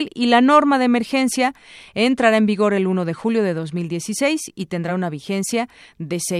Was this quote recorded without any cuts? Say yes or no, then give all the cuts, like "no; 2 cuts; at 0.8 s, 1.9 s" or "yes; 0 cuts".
yes; 0 cuts